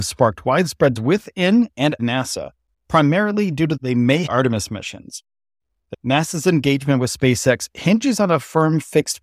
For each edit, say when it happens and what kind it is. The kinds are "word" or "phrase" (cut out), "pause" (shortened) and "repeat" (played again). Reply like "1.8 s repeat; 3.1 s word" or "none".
1.0 s word; 2.0 s word; 3.8 s phrase; 4.3 s phrase; 5.9 s word